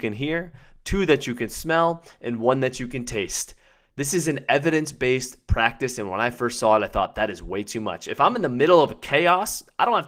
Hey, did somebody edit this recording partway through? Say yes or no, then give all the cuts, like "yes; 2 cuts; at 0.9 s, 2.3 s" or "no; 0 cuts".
no; 0 cuts